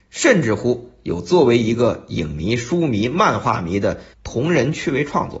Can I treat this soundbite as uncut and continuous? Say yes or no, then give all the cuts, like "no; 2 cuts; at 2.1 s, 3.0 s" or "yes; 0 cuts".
no; 1 cut; at 4.1 s